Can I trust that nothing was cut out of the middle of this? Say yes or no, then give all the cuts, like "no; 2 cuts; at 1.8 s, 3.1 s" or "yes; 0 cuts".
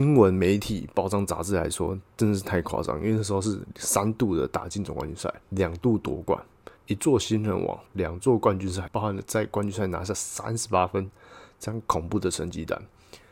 no; 4 cuts; at 5.4 s, 6.8 s, 7.9 s, 8.9 s